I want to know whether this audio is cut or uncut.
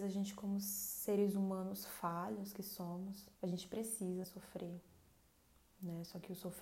cut